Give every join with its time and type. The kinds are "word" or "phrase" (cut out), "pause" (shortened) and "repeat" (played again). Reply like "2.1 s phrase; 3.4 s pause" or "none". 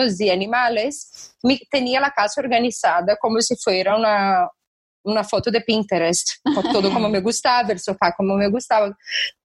none